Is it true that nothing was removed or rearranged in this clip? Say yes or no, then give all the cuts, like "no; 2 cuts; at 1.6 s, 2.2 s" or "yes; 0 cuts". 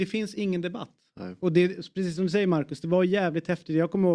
yes; 0 cuts